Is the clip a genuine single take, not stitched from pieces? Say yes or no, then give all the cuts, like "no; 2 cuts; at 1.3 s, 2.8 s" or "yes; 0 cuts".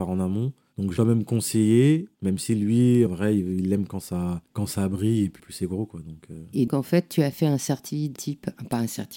no; 7 cuts; at 1.0 s, 2.1 s, 3.1 s, 4.5 s, 5.4 s, 6.7 s, 8.2 s